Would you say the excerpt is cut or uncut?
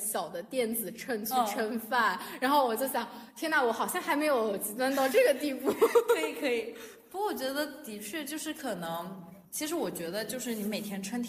cut